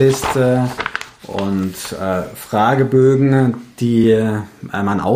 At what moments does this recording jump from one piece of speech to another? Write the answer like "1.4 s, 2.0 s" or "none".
none